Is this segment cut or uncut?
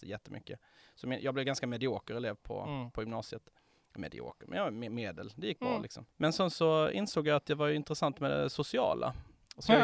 cut